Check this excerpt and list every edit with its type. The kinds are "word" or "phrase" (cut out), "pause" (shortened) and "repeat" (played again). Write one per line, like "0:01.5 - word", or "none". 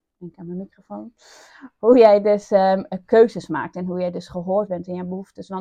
none